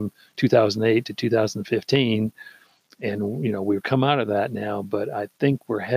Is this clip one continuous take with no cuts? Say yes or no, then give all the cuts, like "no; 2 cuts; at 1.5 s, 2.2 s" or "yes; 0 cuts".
yes; 0 cuts